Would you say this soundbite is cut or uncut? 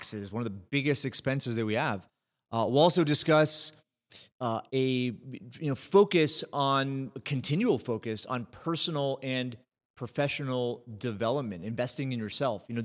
uncut